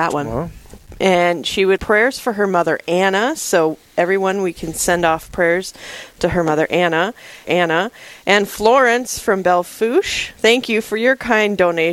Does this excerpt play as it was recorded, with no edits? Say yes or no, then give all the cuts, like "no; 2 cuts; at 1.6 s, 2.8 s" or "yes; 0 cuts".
no; 2 cuts; at 1.8 s, 7.4 s